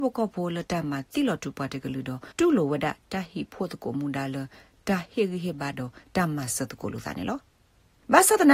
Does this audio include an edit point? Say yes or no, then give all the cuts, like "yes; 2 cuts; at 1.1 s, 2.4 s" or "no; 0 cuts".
yes; 1 cut; at 2.3 s